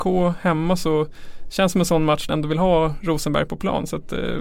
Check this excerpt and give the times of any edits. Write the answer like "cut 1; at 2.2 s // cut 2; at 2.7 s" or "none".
cut 1; at 2.3 s

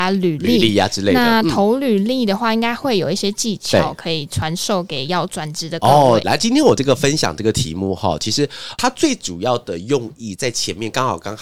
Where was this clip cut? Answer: cut 1; at 6.2 s

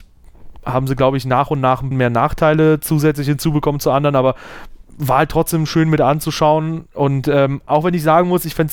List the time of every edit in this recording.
cut 1; at 1.9 s

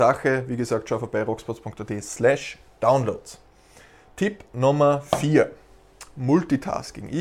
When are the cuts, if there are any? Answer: none

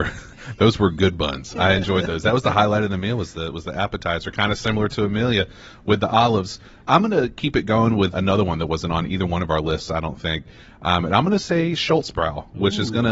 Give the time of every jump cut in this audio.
cut 1; at 8.1 s

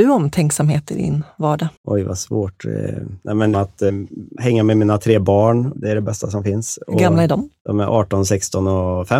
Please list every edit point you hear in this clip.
cut 1; at 1.8 s // cut 2; at 3.5 s

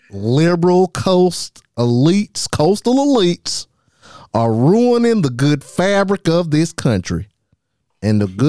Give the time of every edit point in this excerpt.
cut 1; at 1.7 s

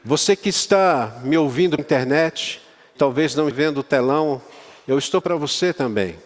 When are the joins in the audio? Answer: cut 1; at 1.8 s // cut 2; at 3.0 s // cut 3; at 3.5 s // cut 4; at 5.2 s

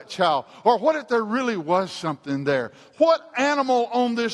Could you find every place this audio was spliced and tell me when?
none

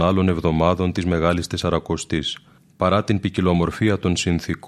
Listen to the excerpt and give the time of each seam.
cut 1; at 2.6 s

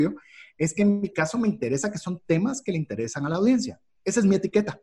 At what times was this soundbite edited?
none

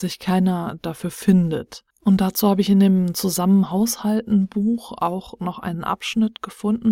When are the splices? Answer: cut 1; at 1.9 s

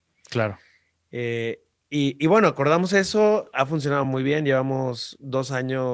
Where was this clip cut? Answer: none

